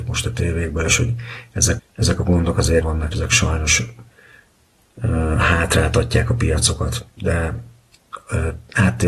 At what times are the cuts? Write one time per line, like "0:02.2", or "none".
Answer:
0:01.8
0:02.8
0:03.1